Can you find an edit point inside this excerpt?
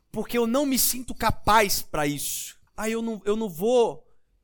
yes; 1 cut; at 2.7 s

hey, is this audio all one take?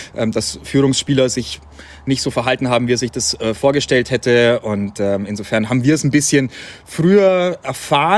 yes; 0 cuts

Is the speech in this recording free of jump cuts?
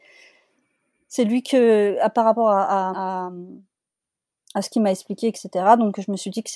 no; 1 cut; at 2.9 s

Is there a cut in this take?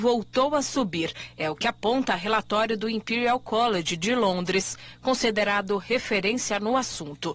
no; 0 cuts

